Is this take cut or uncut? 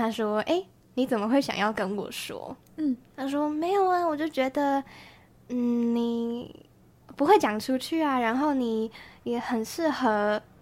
uncut